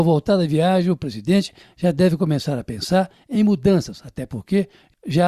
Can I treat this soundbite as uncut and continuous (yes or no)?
yes